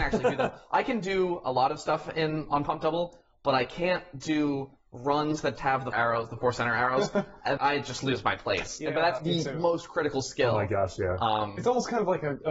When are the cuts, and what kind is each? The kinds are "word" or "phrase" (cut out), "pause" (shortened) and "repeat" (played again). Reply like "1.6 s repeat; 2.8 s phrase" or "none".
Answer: 5.6 s word; 5.9 s word; 7.6 s word; 9.2 s word